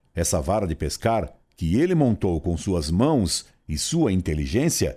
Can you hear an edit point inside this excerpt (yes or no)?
no